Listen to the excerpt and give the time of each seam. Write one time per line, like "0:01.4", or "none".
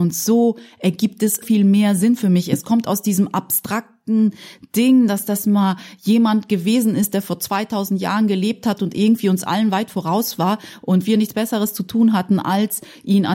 0:01.4